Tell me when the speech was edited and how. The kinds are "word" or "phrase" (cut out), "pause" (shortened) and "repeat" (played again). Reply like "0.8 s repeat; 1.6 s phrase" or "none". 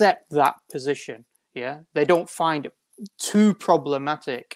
none